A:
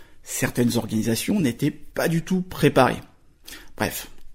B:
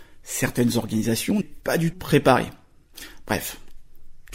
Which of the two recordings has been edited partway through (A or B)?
B